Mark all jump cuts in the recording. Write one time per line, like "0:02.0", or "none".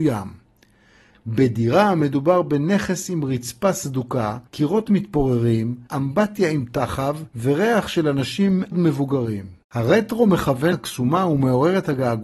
0:04.5
0:05.9
0:07.3
0:08.7
0:09.6
0:10.7